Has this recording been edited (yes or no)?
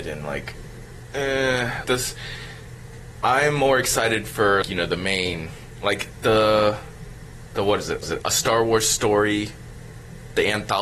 yes